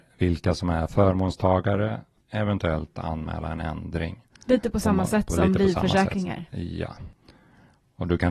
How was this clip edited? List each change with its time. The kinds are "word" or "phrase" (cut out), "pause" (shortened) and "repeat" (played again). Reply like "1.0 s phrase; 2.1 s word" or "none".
none